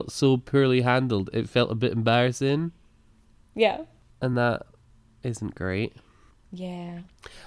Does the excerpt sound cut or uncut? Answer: uncut